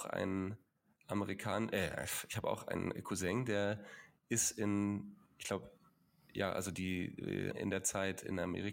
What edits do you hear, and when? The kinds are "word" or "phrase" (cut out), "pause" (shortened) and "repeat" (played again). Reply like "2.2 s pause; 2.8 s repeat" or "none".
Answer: 7.5 s word